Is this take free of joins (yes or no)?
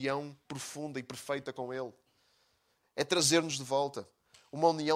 yes